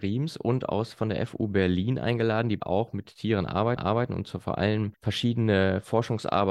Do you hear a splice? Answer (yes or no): yes